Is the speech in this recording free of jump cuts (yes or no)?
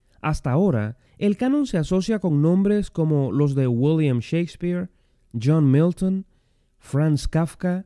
no